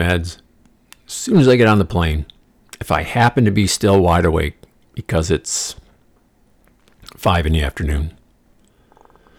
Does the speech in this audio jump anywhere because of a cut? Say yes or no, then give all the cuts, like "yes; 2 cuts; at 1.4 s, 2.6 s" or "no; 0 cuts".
no; 0 cuts